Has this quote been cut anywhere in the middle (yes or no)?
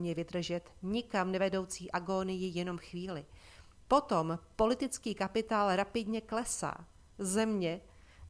no